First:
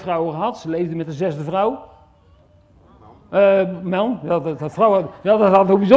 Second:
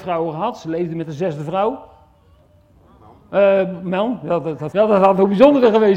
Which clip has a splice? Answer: second; 1 cut; at 4.7 s

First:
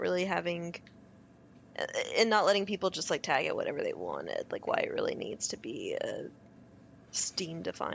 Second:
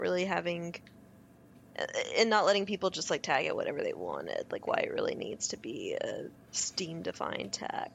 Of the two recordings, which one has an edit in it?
second; 1 cut; at 6.4 s

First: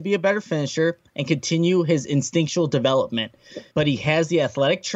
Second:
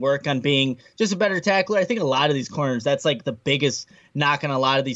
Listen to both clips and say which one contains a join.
first; 1 cut; at 3.7 s

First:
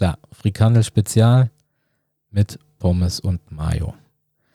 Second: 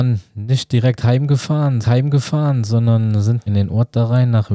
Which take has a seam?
second; 2 cuts; at 1.8 s, 3.5 s

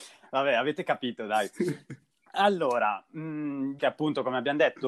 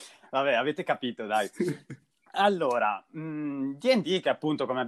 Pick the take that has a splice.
first; 1 cut; at 3.8 s

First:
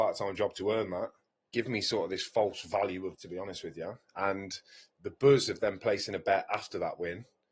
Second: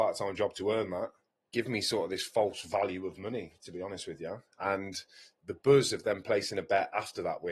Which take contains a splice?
first; 1 cut; at 3.1 s

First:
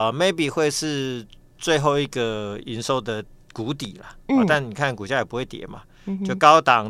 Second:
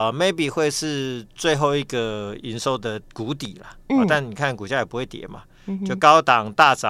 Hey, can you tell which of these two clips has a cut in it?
second; 2 cuts; at 1.3 s, 3.1 s

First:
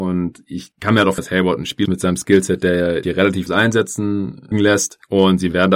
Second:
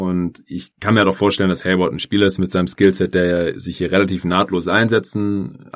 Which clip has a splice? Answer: first; 5 cuts; at 1.2 s, 1.9 s, 3.0 s, 3.5 s, 4.5 s

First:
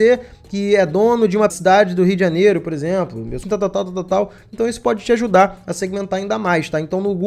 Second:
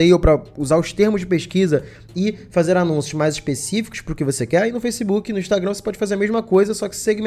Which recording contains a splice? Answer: first; 2 cuts; at 1.5 s, 3.4 s

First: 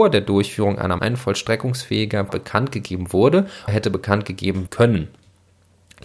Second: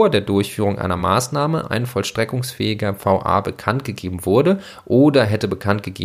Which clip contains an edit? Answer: first; 4 cuts; at 1.0 s, 2.3 s, 3.7 s, 4.7 s

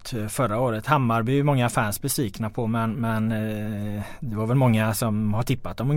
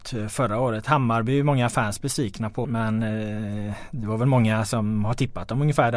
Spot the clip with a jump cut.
second; 1 cut; at 2.6 s

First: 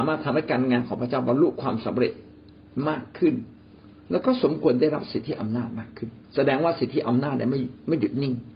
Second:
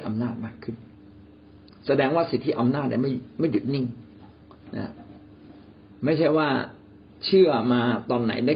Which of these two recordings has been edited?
first; 1 cut; at 6.2 s

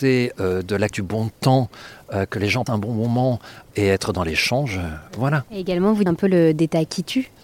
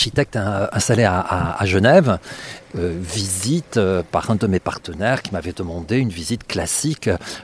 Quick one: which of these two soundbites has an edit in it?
first; 4 cuts; at 0.9 s, 2.7 s, 5.5 s, 6.1 s

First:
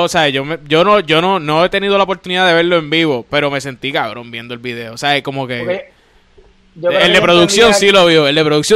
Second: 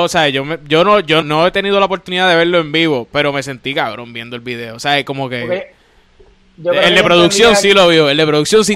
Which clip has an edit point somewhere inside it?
second; 1 cut; at 1.2 s

